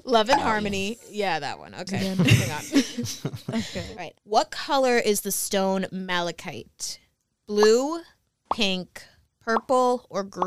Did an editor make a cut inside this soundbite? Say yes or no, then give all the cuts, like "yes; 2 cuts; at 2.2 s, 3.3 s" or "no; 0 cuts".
yes; 1 cut; at 4.2 s